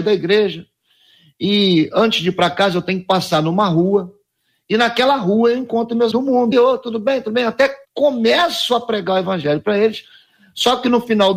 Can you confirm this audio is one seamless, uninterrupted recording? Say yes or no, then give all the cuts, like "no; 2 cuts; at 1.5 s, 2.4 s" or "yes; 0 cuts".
no; 3 cuts; at 6.1 s, 6.5 s, 7.8 s